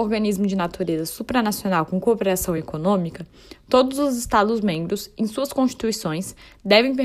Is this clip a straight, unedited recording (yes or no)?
yes